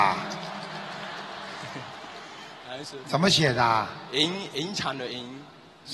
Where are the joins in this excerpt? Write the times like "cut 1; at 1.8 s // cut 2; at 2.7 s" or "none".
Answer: none